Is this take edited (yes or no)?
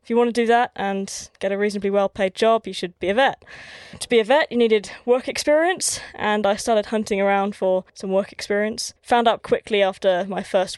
yes